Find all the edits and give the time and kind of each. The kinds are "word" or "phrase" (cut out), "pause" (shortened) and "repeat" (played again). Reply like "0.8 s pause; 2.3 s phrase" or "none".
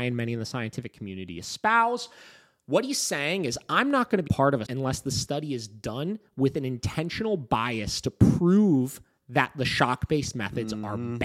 4.3 s word; 4.6 s word